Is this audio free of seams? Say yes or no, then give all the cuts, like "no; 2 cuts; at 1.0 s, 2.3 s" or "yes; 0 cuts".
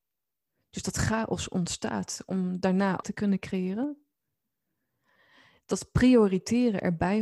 no; 1 cut; at 3.0 s